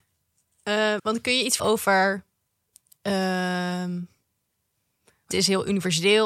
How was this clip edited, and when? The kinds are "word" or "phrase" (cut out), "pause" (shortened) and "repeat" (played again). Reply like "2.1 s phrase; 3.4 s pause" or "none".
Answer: 1.0 s word; 1.6 s word; 5.3 s phrase